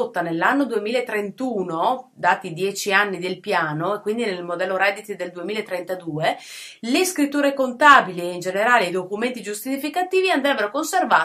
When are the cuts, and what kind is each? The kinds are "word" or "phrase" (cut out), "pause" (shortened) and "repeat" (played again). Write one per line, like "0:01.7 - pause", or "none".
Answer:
none